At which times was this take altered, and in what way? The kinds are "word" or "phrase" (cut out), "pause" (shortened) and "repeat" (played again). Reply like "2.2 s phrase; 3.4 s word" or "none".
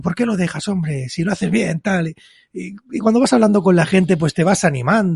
none

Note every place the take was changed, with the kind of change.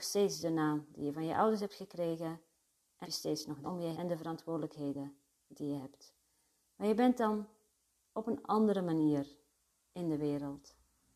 3.0 s word; 3.6 s word; 3.9 s word

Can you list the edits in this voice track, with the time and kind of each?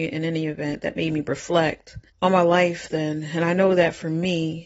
2.1 s pause; 2.9 s word

